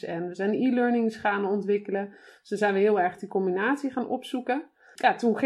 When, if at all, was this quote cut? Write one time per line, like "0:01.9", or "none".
none